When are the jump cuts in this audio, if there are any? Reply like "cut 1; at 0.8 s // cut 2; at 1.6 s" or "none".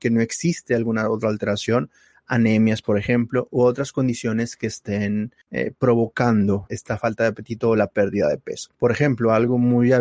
cut 1; at 5.4 s // cut 2; at 6.7 s // cut 3; at 8.7 s